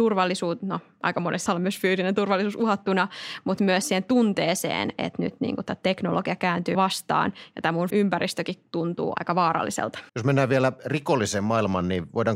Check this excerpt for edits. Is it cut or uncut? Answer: cut